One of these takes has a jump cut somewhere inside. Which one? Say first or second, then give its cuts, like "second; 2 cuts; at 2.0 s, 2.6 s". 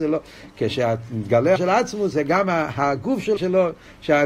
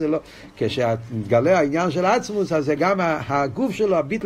first; 3 cuts; at 1.6 s, 2.1 s, 3.4 s